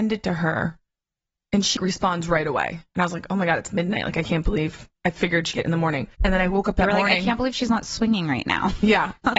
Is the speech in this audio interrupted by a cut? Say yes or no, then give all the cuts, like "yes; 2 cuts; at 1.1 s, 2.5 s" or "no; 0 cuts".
yes; 4 cuts; at 1.8 s, 2.9 s, 5.5 s, 6.1 s